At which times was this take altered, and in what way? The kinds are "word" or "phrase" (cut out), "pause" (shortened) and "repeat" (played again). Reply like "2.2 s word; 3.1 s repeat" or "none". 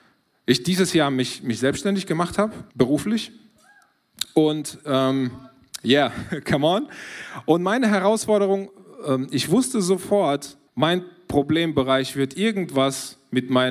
2.7 s pause; 10.7 s pause